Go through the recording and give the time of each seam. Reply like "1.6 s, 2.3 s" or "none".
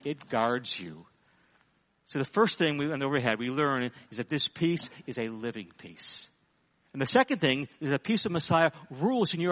none